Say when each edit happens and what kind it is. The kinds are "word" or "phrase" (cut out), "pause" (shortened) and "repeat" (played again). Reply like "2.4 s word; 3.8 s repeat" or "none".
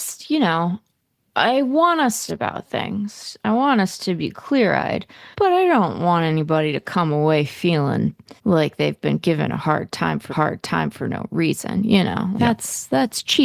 2.3 s phrase; 5.3 s pause; 8.4 s pause; 10.3 s repeat; 12.3 s word